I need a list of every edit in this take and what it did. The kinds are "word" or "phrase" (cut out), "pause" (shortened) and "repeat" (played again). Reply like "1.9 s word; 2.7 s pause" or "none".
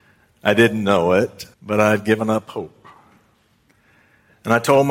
1.5 s pause